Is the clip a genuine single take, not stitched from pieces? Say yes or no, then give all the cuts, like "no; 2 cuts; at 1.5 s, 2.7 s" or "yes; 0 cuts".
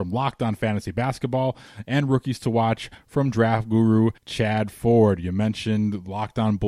no; 1 cut; at 4.2 s